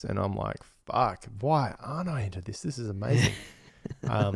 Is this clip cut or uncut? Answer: uncut